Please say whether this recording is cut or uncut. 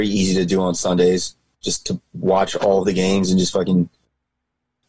uncut